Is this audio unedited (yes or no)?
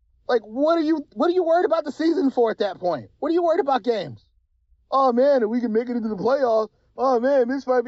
yes